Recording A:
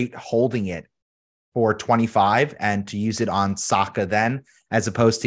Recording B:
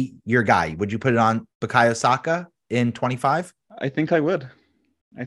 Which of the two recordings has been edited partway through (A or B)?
B